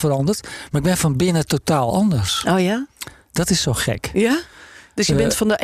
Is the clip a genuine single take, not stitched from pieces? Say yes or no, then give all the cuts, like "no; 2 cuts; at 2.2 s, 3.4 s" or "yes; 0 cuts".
yes; 0 cuts